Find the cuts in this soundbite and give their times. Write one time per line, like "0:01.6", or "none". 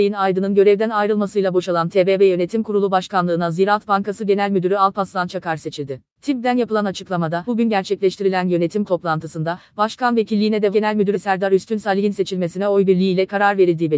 0:07.5
0:08.9
0:10.7
0:11.1